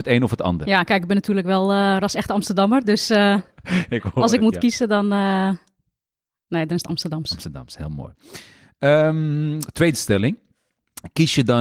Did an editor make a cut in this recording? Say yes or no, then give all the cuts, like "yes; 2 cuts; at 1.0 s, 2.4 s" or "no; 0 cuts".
no; 0 cuts